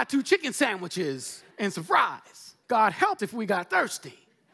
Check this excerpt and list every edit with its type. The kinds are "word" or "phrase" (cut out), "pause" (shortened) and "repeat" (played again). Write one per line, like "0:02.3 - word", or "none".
0:01.5 - pause
0:02.6 - pause
0:03.2 - word